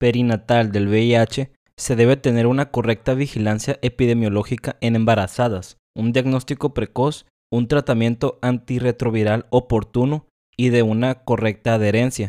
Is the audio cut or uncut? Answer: uncut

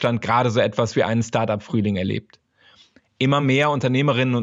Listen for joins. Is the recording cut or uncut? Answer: uncut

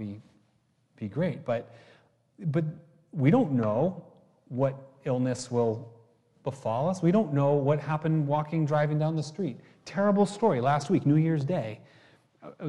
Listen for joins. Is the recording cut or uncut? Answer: uncut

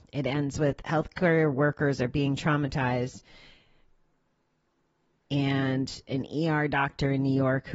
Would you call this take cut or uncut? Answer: uncut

